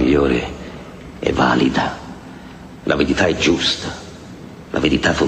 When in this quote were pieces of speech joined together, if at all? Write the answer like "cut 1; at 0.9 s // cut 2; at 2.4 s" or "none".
none